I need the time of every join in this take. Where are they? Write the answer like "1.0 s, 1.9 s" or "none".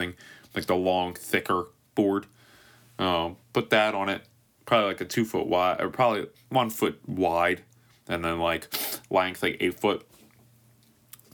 none